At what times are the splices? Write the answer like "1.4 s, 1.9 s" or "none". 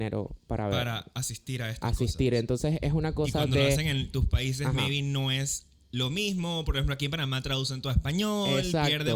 none